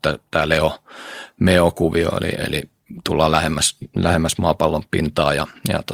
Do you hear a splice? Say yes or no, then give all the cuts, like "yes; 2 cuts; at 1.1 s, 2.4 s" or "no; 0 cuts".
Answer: no; 0 cuts